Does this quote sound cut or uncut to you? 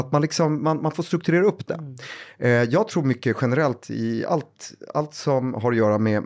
uncut